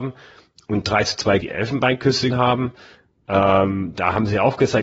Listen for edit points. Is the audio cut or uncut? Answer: cut